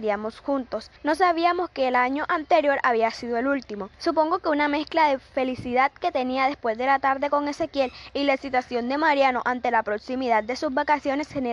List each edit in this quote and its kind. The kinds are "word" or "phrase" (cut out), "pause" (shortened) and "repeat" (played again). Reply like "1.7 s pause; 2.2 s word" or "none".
1.0 s pause; 3.9 s pause